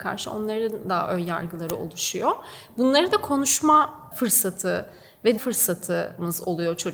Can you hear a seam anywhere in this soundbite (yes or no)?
yes